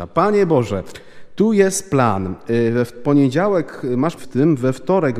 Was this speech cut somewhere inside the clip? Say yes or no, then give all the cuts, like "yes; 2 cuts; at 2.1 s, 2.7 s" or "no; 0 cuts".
yes; 1 cut; at 4.2 s